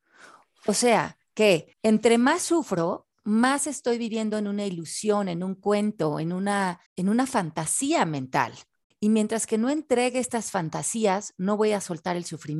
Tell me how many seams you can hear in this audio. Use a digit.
4